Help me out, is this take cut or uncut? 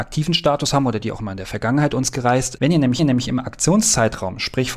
cut